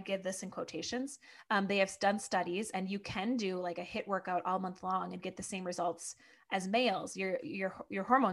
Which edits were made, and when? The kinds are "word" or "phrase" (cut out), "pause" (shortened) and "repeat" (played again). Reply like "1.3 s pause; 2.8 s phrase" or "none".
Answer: none